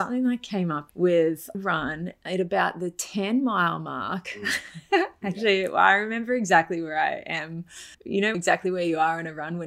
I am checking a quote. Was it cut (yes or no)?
yes